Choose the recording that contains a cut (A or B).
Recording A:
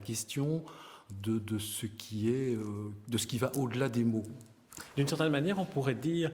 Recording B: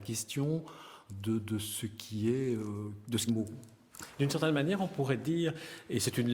B